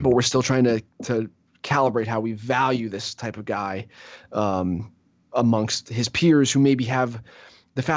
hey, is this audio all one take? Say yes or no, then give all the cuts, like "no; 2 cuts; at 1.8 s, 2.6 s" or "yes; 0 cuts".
yes; 0 cuts